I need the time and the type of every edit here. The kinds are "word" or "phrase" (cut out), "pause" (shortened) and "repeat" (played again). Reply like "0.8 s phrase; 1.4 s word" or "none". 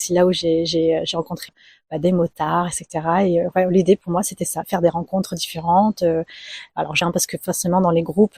4.6 s word; 7.0 s word

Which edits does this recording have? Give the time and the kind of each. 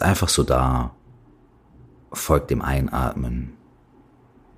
none

